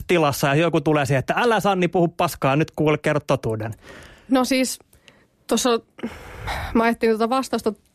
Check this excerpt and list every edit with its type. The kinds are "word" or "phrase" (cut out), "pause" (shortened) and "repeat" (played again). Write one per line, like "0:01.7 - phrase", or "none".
none